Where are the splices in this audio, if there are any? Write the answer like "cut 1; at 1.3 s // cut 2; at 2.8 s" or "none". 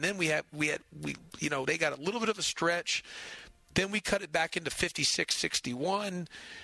cut 1; at 1.6 s